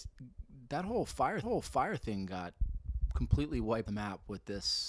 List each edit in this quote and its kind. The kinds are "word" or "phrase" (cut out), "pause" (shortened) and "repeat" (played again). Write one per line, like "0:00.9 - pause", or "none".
0:01.4 - repeat
0:03.9 - word